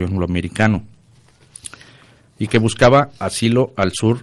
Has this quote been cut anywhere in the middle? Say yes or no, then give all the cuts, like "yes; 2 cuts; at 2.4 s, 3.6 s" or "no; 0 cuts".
no; 0 cuts